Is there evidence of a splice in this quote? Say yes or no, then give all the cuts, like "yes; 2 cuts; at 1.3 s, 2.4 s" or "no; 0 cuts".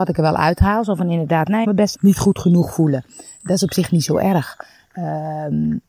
yes; 2 cuts; at 1.6 s, 1.9 s